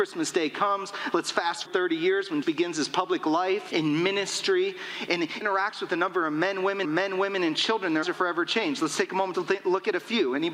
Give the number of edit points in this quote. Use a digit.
7